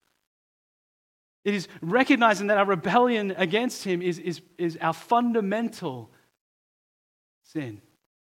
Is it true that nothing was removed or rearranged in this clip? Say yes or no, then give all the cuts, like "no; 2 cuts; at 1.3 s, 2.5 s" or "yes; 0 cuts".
yes; 0 cuts